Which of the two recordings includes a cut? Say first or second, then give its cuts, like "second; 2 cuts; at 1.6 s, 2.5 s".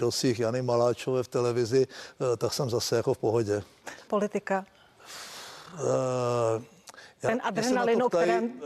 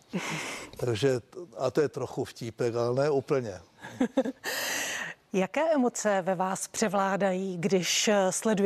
first; 1 cut; at 4.1 s